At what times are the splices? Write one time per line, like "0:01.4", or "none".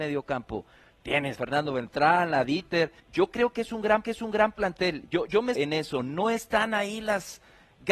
0:01.4
0:03.0
0:04.0
0:05.6